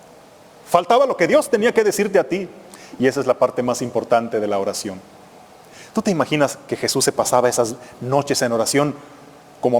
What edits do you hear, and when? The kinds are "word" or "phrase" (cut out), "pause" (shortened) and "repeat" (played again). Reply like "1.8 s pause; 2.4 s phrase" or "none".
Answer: none

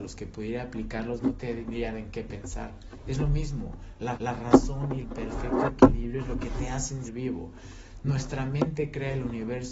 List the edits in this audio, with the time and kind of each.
1.9 s word; 4.1 s repeat; 5.0 s phrase; 7.0 s word

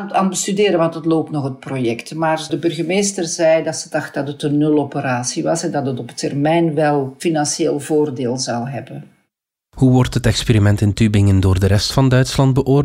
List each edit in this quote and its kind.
2.5 s word

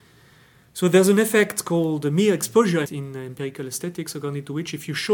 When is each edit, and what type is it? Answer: 2.8 s word

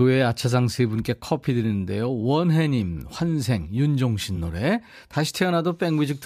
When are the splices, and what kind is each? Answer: none

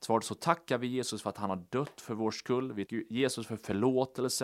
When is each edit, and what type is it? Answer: 2.9 s word

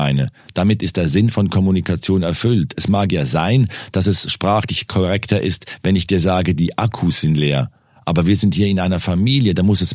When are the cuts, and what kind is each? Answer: none

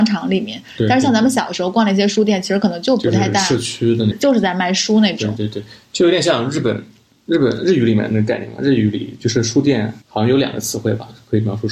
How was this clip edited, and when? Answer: 10.0 s pause

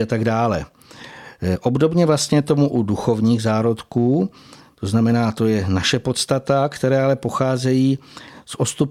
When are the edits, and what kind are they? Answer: none

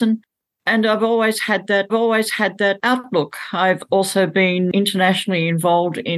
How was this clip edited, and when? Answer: 1.9 s repeat

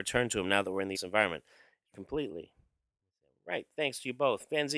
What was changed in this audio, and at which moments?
0.9 s word; 1.9 s word

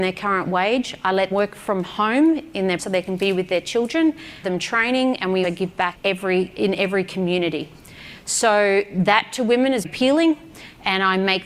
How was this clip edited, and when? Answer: 1.3 s word; 2.8 s word; 4.4 s word; 5.4 s word; 5.9 s word; 9.8 s word

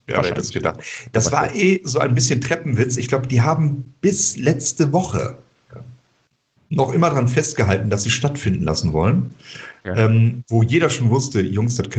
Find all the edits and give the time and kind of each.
none

